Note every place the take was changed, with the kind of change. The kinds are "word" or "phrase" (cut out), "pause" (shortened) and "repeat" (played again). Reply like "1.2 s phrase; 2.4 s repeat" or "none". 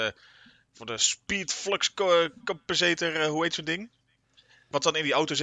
none